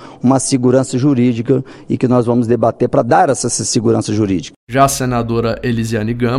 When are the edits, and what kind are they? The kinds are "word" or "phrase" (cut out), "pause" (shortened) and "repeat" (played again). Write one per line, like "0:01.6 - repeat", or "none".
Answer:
none